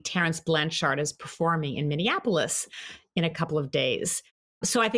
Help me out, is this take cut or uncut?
uncut